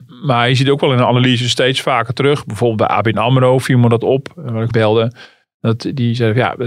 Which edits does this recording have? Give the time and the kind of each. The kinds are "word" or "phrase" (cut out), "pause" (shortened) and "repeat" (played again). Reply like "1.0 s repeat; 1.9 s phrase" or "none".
4.7 s phrase